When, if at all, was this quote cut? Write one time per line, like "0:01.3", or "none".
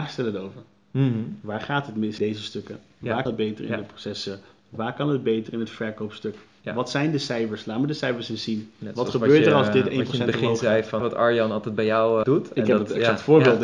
0:02.2
0:03.3
0:11.0
0:12.2